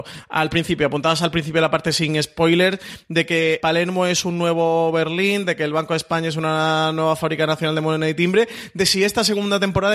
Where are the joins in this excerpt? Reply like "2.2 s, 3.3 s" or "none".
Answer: 3.6 s